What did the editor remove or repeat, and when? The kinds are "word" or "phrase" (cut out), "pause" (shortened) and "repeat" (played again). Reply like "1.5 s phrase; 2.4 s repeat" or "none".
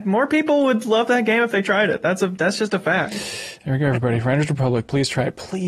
none